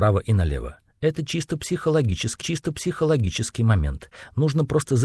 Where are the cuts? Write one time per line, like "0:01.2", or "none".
0:02.4